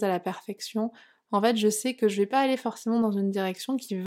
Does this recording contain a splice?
no; 0 cuts

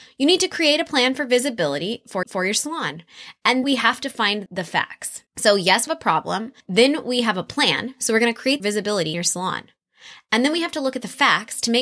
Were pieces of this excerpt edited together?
yes; 7 cuts; at 2.2 s, 3.6 s, 4.5 s, 5.3 s, 5.9 s, 8.6 s, 9.1 s

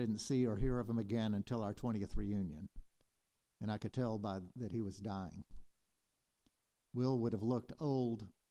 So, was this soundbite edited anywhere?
no; 0 cuts

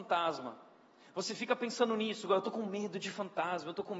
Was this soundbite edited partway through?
no; 0 cuts

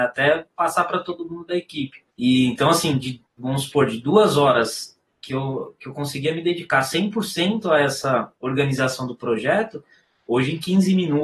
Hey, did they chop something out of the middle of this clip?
yes; 3 cuts; at 2.1 s, 3.3 s, 8.4 s

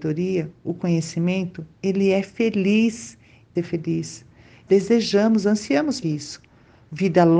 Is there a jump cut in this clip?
yes; 4 cuts; at 1.7 s, 3.6 s, 4.7 s, 6.0 s

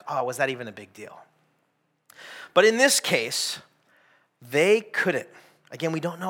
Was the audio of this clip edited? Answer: no; 0 cuts

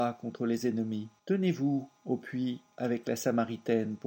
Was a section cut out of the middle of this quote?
yes; 1 cut; at 1.2 s

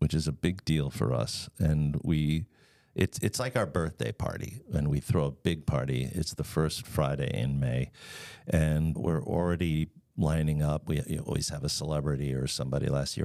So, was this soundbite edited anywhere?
yes; 1 cut; at 9.0 s

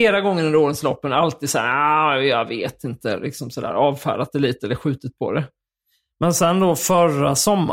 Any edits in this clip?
no; 0 cuts

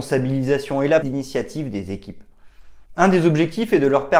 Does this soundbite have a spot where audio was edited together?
yes; 2 cuts; at 1.0 s, 2.8 s

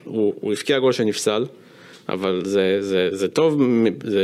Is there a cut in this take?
no; 0 cuts

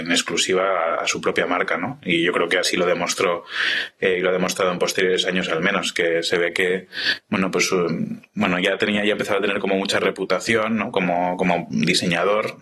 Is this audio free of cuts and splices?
yes; 0 cuts

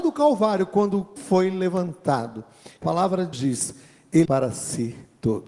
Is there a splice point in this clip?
yes; 4 cuts; at 1.2 s, 2.8 s, 3.3 s, 4.2 s

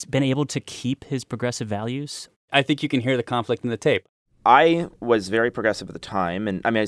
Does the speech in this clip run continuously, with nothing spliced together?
no; 1 cut; at 4.9 s

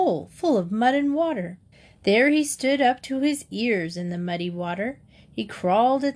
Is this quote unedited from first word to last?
no; 1 cut; at 1.7 s

